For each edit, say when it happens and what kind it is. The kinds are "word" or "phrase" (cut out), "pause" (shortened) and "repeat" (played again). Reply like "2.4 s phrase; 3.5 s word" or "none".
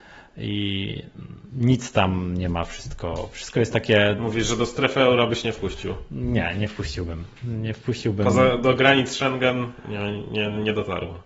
1.4 s pause